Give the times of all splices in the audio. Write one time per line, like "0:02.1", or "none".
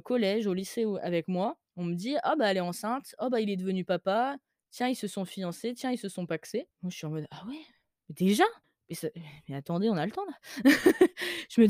0:01.7
0:06.7
0:08.6

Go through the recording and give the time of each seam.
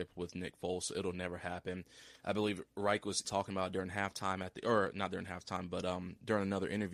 0:03.2

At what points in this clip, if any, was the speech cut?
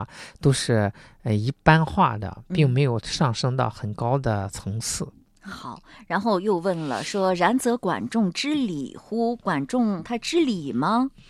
none

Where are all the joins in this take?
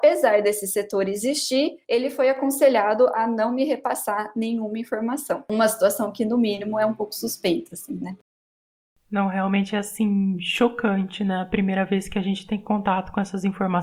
0:01.8

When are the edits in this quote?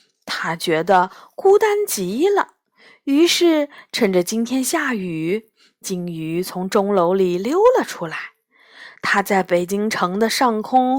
none

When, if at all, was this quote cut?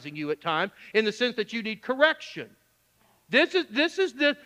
none

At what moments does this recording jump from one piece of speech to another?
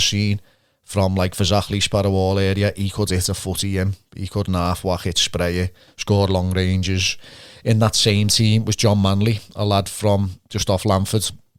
none

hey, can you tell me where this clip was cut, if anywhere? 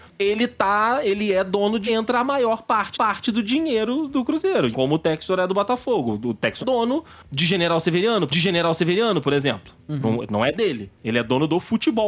0:01.9
0:02.9
0:04.7
0:06.6
0:08.3
0:11.0

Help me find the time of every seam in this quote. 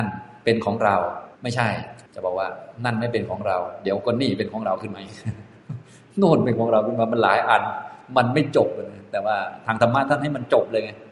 0:01.3
0:02.1

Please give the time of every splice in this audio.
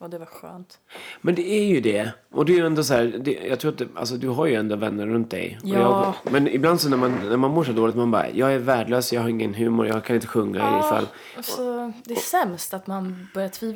none

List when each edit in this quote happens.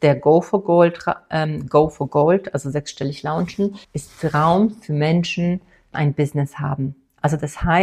0:03.8
0:05.9

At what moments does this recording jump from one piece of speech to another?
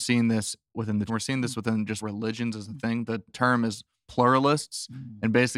0:01.1
0:02.0
0:03.3
0:04.0

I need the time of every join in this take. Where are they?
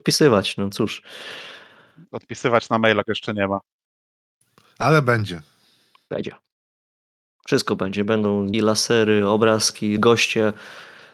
0:03.0
0:08.5
0:10.0

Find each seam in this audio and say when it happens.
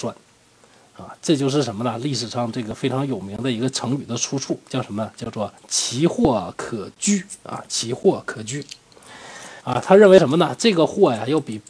0:05.6
0:09.6

